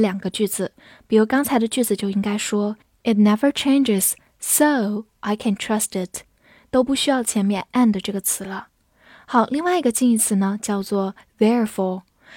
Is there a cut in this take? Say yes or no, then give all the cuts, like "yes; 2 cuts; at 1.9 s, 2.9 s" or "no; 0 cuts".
no; 0 cuts